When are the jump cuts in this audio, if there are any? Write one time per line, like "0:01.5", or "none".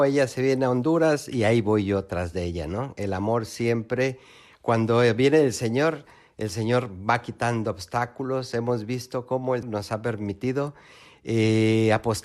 0:09.6